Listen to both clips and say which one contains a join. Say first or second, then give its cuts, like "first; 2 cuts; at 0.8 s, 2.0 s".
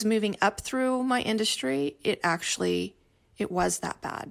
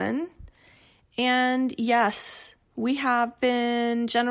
second; 1 cut; at 2.6 s